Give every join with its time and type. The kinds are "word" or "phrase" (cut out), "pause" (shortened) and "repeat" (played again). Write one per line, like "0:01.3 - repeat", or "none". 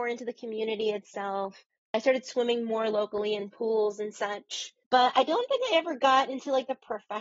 0:01.8 - pause
0:04.8 - pause

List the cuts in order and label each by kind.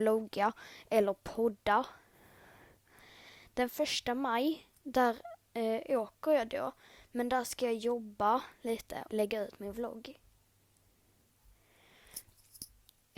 0:04.8 - pause
0:09.1 - word

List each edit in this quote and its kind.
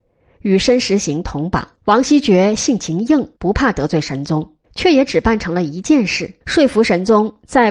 0:01.8 - pause
0:03.4 - pause
0:04.6 - pause
0:06.4 - pause

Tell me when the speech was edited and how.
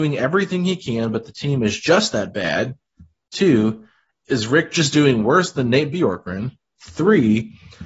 none

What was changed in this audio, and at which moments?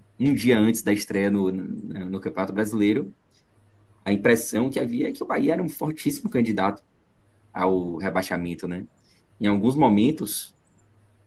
none

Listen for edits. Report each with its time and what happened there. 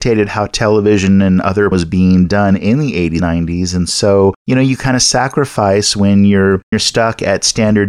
0:01.7 - word
0:03.2 - word
0:04.4 - pause
0:06.7 - word

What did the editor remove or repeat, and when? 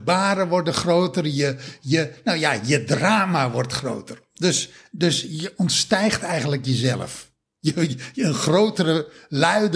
none

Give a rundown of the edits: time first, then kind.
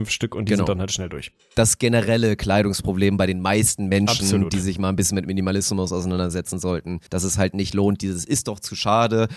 0:07.1 - pause

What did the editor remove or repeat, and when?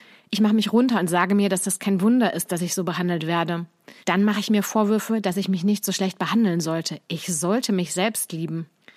0:04.0 - pause

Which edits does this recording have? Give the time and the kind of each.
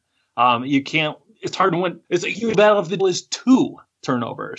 0:02.0 - pause
0:02.5 - word
0:03.0 - word

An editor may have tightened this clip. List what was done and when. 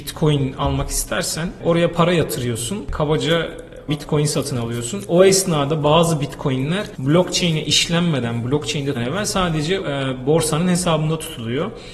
0:03.9 - word
0:09.0 - word
0:09.8 - word

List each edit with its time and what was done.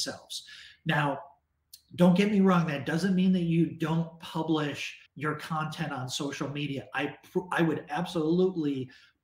0:05.1 - pause

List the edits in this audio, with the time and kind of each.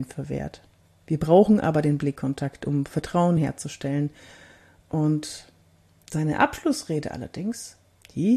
none

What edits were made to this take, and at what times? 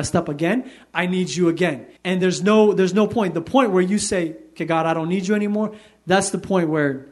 0:02.0 - pause

